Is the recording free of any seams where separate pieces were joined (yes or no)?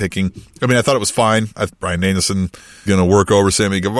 no